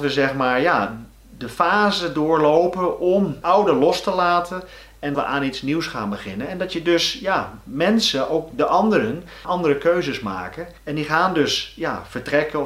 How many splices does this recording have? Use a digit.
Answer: 4